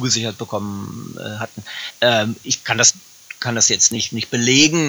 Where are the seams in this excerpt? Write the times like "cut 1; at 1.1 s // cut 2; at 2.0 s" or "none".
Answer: none